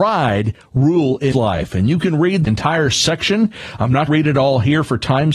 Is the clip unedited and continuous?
no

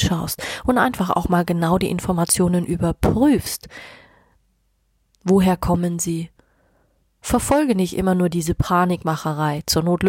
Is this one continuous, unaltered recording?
yes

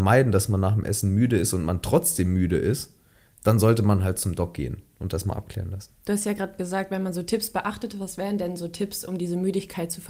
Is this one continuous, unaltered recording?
yes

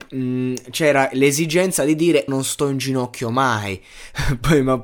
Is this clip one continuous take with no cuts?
no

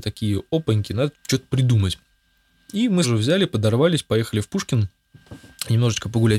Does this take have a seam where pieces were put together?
yes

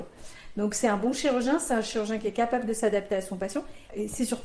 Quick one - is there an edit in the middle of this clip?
no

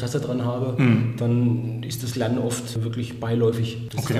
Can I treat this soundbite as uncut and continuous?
yes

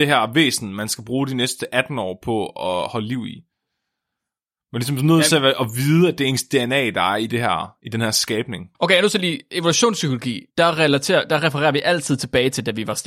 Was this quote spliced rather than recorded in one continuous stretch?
yes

